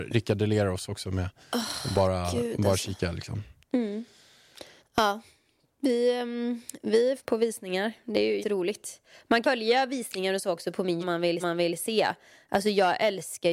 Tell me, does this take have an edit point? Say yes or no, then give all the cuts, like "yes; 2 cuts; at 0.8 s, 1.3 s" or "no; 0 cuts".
yes; 6 cuts; at 4.8 s, 7.2 s, 8.4 s, 9.4 s, 11.0 s, 11.4 s